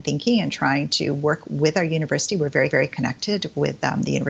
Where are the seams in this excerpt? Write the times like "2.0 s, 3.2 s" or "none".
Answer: 2.7 s